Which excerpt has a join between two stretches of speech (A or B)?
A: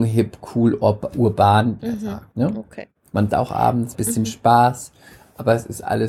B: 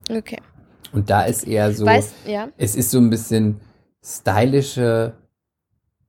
A